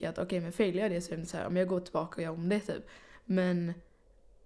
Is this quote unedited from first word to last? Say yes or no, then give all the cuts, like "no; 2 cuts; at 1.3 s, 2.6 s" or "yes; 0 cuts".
yes; 0 cuts